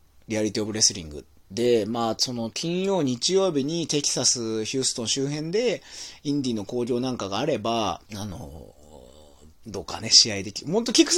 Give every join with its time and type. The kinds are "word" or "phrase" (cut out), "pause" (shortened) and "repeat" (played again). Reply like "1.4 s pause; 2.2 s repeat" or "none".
8.0 s pause